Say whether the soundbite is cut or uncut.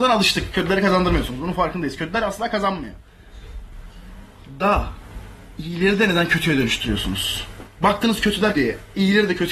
cut